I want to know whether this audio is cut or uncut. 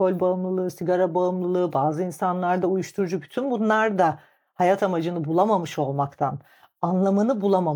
uncut